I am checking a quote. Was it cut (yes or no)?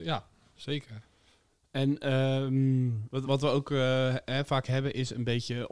yes